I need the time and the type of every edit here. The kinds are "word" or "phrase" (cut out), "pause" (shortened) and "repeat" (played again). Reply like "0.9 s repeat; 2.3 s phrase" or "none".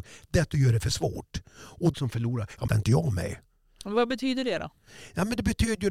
1.9 s phrase; 2.7 s phrase